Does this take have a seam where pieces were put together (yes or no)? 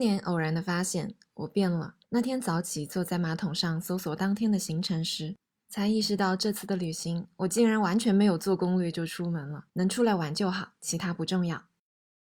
yes